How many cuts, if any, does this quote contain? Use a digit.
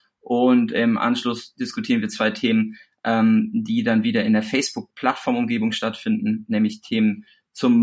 0